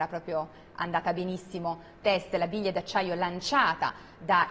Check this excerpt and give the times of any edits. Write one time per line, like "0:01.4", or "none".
0:02.0